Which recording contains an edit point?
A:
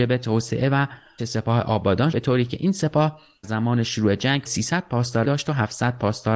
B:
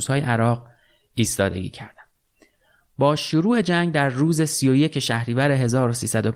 A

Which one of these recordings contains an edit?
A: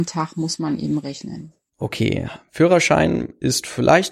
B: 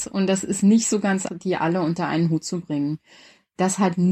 B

